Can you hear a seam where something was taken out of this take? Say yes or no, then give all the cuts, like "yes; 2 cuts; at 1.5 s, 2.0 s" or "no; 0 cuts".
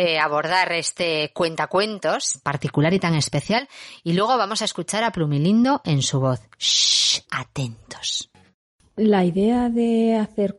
yes; 2 cuts; at 2.4 s, 7.2 s